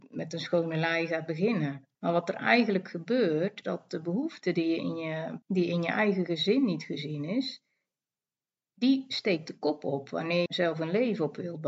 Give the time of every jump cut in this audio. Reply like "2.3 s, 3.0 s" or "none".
1.9 s, 3.6 s, 5.4 s, 10.5 s